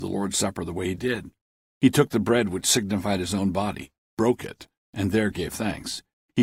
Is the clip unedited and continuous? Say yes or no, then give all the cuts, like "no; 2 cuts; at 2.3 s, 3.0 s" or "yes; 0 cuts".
yes; 0 cuts